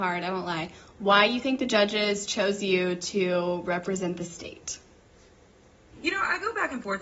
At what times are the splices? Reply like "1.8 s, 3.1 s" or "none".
none

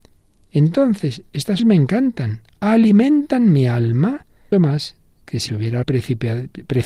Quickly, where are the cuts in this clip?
1.6 s, 4.5 s, 5.5 s, 5.8 s

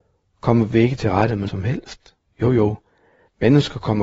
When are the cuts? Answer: 1.5 s, 2.2 s

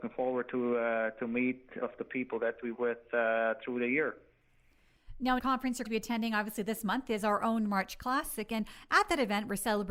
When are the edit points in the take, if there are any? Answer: 1.8 s, 2.7 s, 5.4 s, 5.8 s

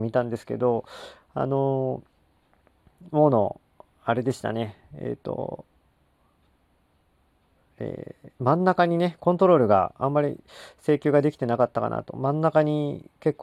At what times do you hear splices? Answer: 8.3 s

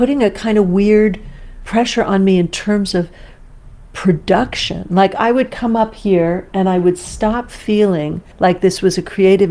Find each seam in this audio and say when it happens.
8.3 s

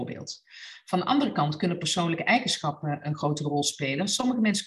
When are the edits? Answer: none

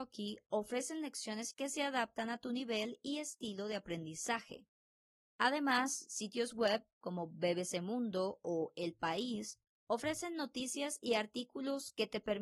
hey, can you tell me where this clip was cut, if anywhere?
1.5 s

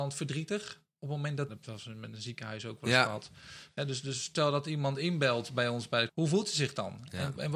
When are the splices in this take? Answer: 1.5 s, 6.1 s

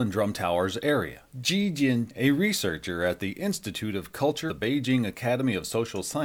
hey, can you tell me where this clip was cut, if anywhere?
1.3 s, 2.1 s, 4.5 s

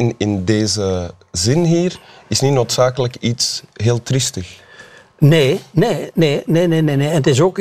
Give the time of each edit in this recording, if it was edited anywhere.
none

